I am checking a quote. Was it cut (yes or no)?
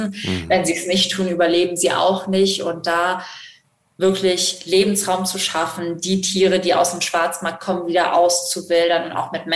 no